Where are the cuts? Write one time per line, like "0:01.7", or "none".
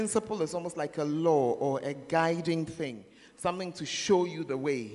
none